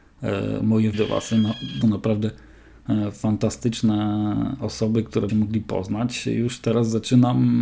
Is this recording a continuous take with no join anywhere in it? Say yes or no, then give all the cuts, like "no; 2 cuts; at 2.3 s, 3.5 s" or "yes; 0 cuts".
no; 3 cuts; at 0.9 s, 1.8 s, 5.3 s